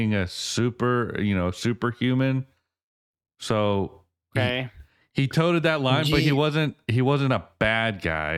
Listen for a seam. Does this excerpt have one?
yes; 1 cut; at 4.2 s

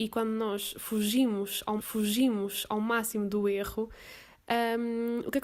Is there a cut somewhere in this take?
yes; 1 cut; at 1.8 s

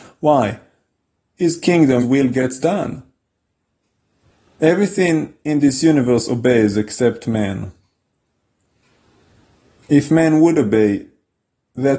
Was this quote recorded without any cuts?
no; 1 cut; at 2.0 s

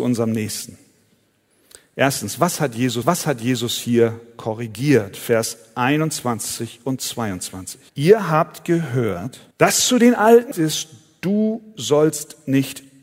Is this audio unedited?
no; 4 cuts; at 3.0 s, 7.9 s, 9.5 s, 10.5 s

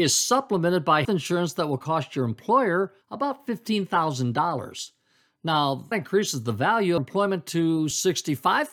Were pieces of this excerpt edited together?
yes; 4 cuts; at 1.0 s, 3.0 s, 5.9 s, 7.0 s

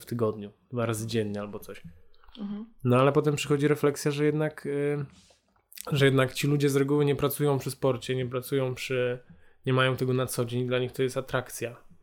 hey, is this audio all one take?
yes; 0 cuts

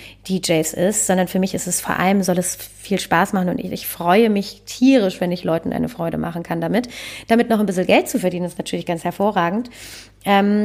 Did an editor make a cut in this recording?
no; 0 cuts

